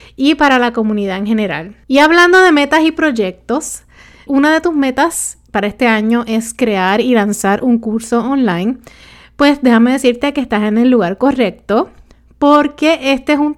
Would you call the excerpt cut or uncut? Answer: cut